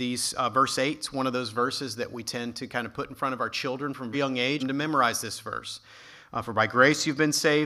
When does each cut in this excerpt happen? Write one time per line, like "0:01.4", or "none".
0:04.1
0:04.6